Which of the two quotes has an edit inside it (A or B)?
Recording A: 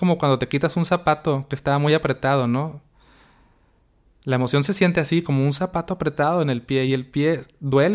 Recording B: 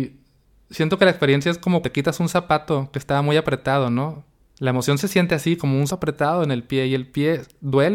B